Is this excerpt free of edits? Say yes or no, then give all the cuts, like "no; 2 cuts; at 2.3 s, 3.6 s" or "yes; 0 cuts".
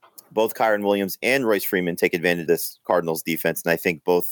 no; 1 cut; at 2.5 s